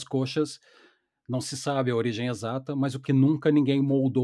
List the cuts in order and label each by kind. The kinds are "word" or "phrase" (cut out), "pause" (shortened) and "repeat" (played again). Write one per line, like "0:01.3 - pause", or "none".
0:03.0 - phrase